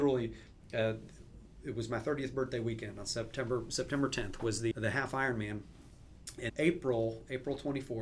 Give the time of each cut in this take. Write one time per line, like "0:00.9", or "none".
0:04.7
0:06.5